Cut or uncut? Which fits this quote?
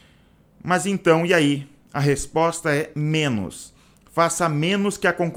uncut